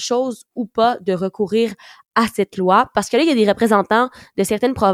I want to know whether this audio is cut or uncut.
uncut